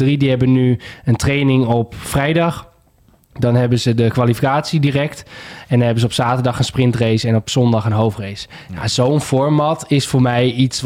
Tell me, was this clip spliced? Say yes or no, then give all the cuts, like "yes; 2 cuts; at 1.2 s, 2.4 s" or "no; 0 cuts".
no; 0 cuts